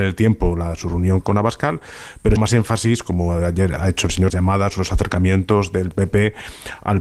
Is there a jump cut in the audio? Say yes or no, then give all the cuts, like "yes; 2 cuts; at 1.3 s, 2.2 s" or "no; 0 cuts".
yes; 4 cuts; at 1.2 s, 2.4 s, 3.8 s, 4.3 s